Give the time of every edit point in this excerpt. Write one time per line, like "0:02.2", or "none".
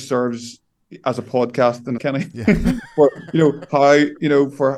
0:02.0